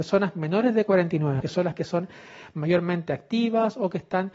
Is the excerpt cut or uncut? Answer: cut